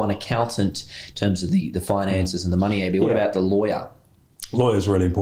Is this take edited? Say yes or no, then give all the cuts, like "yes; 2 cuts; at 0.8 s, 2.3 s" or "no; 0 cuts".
no; 0 cuts